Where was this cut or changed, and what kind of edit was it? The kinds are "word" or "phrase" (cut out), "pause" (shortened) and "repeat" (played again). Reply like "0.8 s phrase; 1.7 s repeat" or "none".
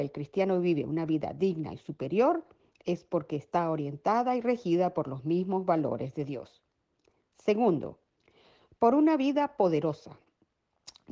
none